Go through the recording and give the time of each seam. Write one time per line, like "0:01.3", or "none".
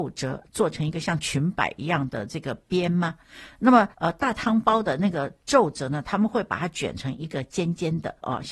0:03.9